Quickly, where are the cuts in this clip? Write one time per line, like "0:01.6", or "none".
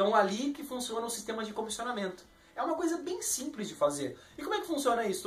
none